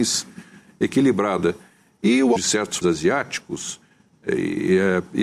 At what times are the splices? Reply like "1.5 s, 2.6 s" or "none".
2.4 s, 2.8 s